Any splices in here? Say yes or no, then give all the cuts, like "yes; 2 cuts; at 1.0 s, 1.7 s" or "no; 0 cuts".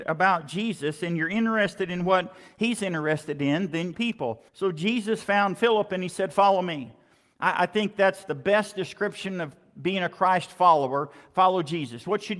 yes; 2 cuts; at 3.9 s, 4.5 s